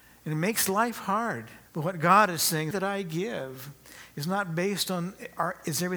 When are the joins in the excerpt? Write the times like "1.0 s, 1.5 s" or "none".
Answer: 1.7 s, 2.7 s